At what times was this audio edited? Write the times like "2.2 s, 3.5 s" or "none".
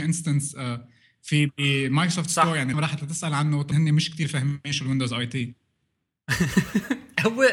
2.7 s, 3.7 s